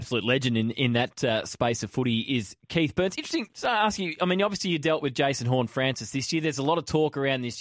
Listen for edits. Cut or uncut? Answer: cut